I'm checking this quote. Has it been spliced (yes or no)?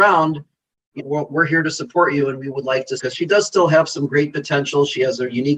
yes